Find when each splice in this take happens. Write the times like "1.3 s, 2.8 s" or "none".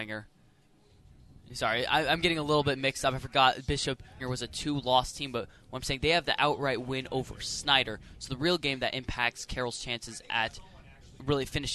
4.2 s